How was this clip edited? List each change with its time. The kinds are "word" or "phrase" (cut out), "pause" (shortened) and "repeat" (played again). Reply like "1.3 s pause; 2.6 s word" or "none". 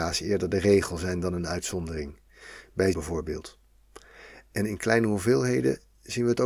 2.9 s word